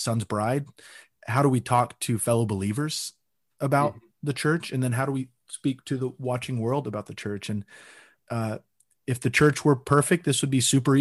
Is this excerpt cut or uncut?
uncut